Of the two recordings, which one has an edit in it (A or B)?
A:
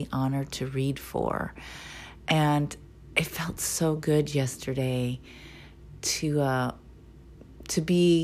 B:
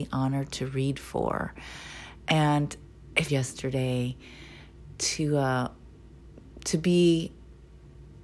B